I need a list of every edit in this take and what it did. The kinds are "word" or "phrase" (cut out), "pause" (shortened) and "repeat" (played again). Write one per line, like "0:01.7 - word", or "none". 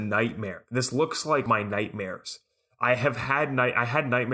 0:01.5 - phrase